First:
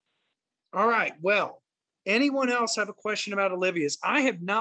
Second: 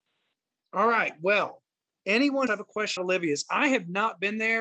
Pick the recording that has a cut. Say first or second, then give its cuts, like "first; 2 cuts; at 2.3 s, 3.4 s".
second; 2 cuts; at 2.5 s, 3.0 s